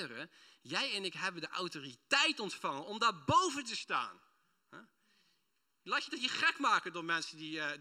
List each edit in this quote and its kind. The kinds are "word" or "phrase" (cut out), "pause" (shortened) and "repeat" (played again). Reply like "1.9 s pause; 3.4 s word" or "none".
none